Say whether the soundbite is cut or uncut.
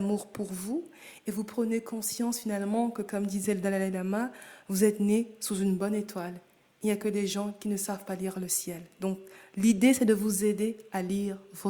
uncut